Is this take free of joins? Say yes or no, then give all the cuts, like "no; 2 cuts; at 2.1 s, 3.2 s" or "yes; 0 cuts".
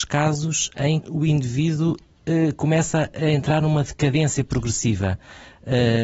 no; 1 cut; at 1.0 s